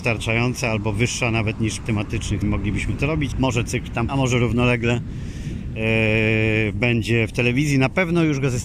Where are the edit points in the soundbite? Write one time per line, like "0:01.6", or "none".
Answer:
0:01.8
0:02.4
0:03.3
0:04.1